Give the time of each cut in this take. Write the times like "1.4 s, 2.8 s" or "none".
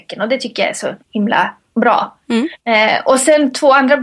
1.0 s, 2.6 s